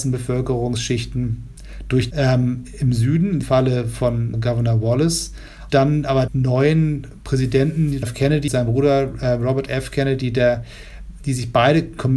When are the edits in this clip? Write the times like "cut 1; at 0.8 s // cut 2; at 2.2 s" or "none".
cut 1; at 2.1 s // cut 2; at 3.4 s // cut 3; at 4.3 s // cut 4; at 5.7 s // cut 5; at 6.3 s // cut 6; at 8.0 s // cut 7; at 8.5 s

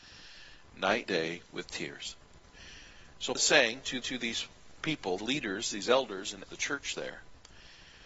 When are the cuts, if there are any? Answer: cut 1; at 1.1 s // cut 2; at 1.5 s // cut 3; at 3.3 s // cut 4; at 4.0 s // cut 5; at 5.2 s // cut 6; at 6.5 s

